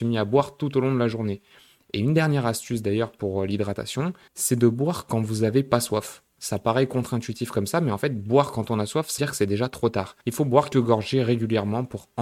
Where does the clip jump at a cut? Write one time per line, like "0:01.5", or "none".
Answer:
0:04.3
0:09.2
0:10.2
0:10.7